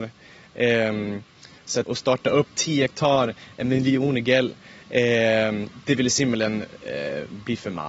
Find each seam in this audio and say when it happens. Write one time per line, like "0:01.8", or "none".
0:01.8